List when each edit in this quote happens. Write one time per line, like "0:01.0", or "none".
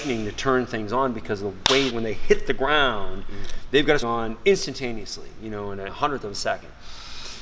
0:01.9
0:04.0
0:05.9